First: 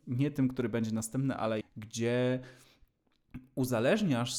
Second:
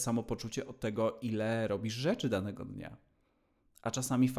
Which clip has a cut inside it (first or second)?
first